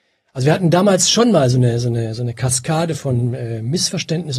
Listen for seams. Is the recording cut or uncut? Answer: cut